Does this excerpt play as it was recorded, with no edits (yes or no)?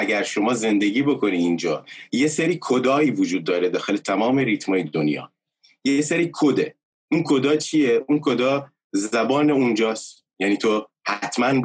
yes